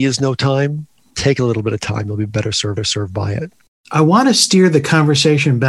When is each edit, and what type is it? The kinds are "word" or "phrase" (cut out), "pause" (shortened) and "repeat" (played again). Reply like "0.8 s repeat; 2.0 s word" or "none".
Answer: 2.8 s repeat